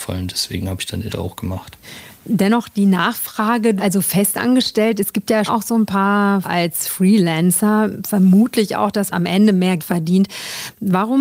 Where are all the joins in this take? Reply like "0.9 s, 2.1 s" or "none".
1.1 s, 3.8 s, 5.5 s, 6.4 s, 9.1 s, 9.8 s